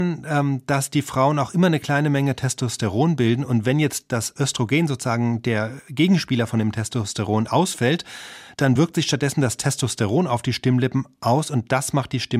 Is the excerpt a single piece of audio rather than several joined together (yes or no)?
yes